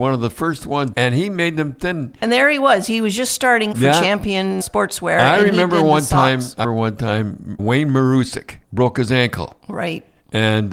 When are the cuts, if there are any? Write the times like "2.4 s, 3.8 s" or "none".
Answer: 0.9 s, 3.7 s, 4.6 s, 6.6 s, 7.6 s, 8.6 s